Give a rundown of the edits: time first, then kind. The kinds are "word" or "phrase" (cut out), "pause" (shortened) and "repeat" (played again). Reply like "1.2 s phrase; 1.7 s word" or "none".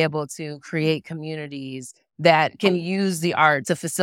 none